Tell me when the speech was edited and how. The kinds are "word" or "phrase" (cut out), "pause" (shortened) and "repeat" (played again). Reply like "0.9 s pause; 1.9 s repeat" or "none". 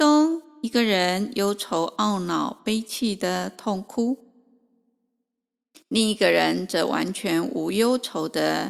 none